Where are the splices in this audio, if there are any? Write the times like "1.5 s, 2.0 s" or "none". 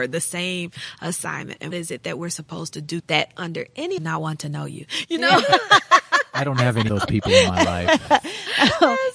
1.7 s, 3.0 s, 4.0 s, 6.9 s